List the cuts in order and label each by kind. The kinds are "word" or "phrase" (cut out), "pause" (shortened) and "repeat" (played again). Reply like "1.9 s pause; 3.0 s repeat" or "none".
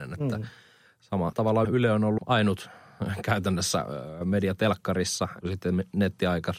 1.3 s word; 1.6 s word; 2.2 s word; 5.4 s word

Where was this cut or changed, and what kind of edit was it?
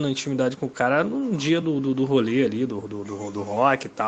none

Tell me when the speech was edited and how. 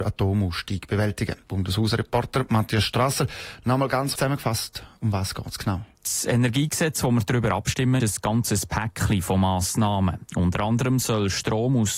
1.4 s pause; 4.2 s word; 5.9 s pause; 8.0 s word

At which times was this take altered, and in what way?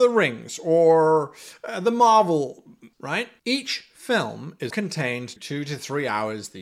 2.9 s word; 4.7 s word; 5.4 s word

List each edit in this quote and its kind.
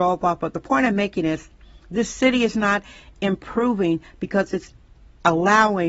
none

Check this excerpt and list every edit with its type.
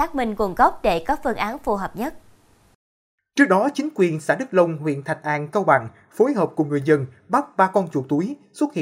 none

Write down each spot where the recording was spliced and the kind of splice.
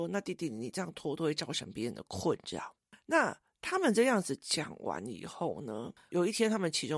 none

